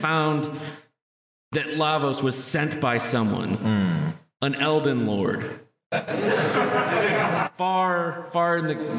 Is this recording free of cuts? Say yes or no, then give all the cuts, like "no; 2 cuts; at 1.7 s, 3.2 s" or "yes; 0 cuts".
yes; 0 cuts